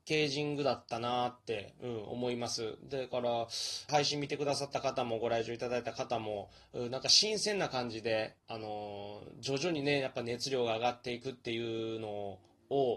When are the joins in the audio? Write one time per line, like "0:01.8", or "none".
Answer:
0:03.9
0:08.4

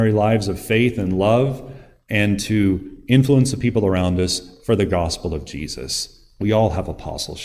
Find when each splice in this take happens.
none

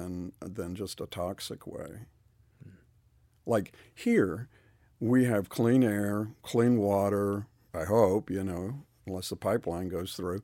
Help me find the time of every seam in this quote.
0:07.7

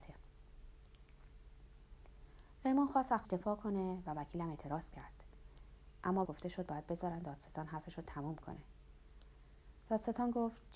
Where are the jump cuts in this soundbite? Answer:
0:03.2
0:06.2

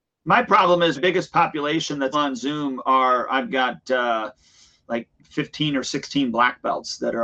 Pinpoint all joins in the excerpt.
0:01.0
0:02.1
0:05.2

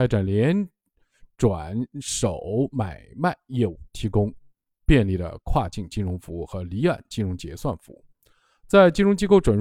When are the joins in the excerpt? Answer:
none

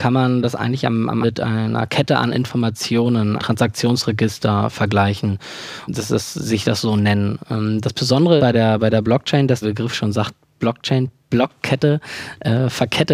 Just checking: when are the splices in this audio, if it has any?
0:01.2
0:03.4
0:05.9
0:08.4
0:09.6

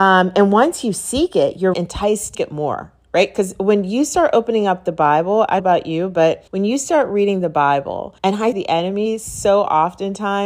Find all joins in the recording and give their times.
0:01.7
0:02.3
0:05.6
0:06.5
0:08.2
0:08.5

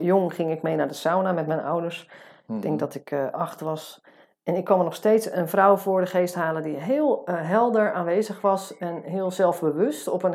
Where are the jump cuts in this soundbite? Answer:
none

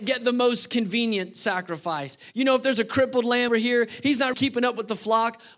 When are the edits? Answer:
0:03.5
0:04.3

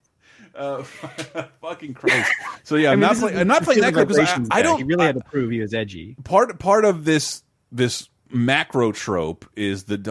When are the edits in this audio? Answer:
none

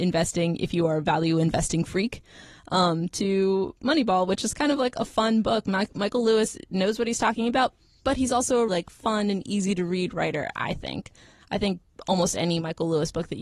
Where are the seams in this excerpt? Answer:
0:08.7

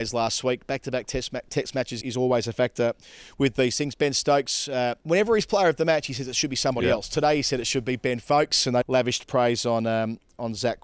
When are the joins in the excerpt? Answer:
0:02.0
0:05.0
0:08.8

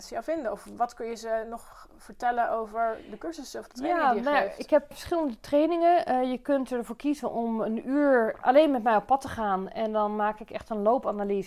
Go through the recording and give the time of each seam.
0:04.9
0:08.4

